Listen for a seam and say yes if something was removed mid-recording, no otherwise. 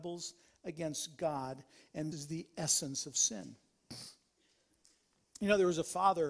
yes